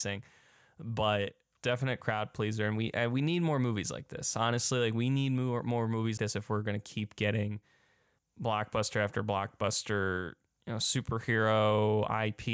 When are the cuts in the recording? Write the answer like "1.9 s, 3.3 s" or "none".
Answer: 6.2 s